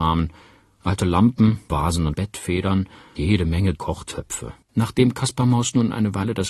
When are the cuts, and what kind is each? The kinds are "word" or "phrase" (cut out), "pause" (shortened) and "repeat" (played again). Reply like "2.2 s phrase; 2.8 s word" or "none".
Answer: 1.7 s word; 2.1 s word; 3.2 s word; 3.7 s word; 4.6 s pause